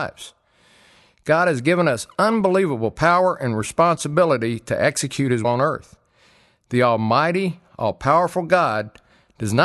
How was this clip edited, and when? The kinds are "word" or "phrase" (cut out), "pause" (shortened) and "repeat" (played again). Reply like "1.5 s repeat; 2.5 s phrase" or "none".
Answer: 5.4 s word